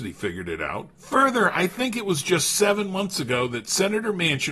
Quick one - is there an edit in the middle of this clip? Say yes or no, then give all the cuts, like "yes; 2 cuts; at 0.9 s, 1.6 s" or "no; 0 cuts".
yes; 1 cut; at 0.9 s